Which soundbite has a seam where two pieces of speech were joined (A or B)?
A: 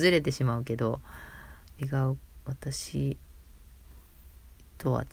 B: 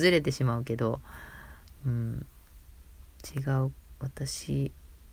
A